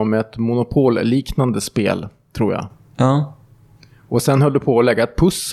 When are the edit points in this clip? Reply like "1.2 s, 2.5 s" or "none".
none